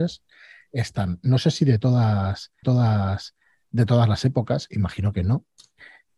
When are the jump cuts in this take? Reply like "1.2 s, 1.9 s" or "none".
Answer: 2.6 s